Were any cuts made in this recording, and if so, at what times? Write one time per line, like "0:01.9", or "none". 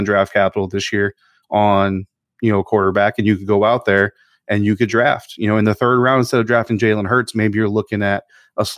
none